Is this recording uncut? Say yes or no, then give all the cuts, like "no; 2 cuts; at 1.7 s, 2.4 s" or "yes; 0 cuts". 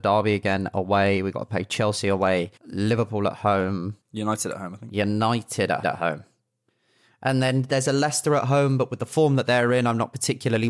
no; 3 cuts; at 2.6 s, 4.0 s, 5.8 s